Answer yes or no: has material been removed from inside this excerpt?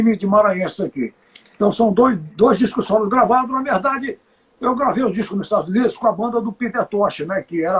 no